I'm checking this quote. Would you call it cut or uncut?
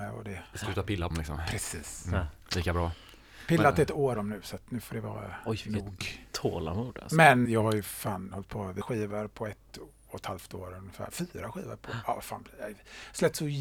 cut